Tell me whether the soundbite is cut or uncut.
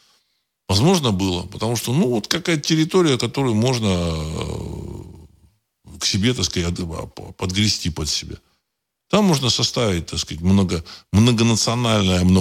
uncut